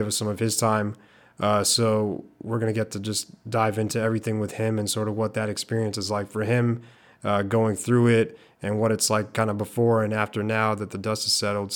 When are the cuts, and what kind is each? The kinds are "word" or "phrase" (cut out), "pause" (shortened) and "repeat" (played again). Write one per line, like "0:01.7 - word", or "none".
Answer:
none